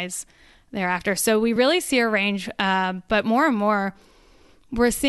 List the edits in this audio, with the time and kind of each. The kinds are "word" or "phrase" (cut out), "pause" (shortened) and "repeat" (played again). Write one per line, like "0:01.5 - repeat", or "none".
none

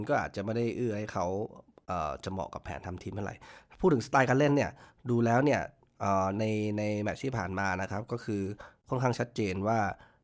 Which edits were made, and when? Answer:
none

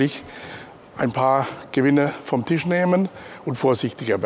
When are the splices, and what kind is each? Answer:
none

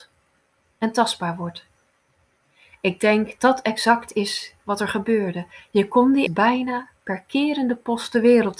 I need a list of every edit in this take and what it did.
0:03.4 - word
0:06.3 - word

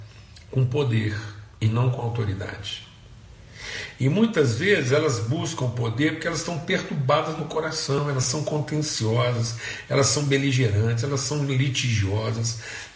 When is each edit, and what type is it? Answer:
0:01.5 - pause

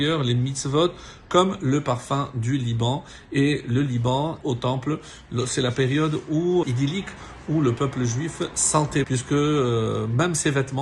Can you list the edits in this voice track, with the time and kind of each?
0:04.4 - phrase
0:06.6 - word
0:09.0 - word

